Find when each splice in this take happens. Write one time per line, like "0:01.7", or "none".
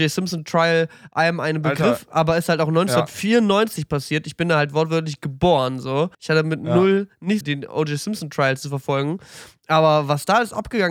0:06.1
0:07.4